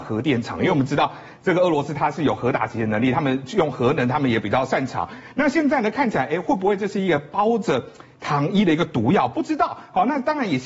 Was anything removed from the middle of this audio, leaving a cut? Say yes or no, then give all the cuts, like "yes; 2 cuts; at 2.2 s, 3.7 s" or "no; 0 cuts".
no; 0 cuts